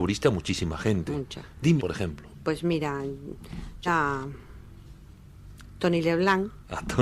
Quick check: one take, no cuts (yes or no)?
no